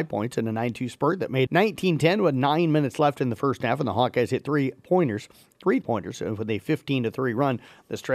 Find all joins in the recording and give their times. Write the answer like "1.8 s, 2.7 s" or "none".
1.5 s, 5.8 s